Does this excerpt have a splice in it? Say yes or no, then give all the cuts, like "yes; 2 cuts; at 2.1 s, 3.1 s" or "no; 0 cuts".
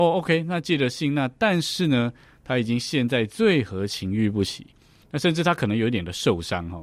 no; 0 cuts